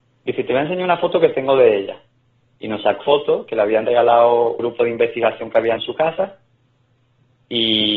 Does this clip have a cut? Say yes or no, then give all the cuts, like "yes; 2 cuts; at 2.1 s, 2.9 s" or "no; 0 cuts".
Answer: yes; 3 cuts; at 3.0 s, 4.6 s, 5.8 s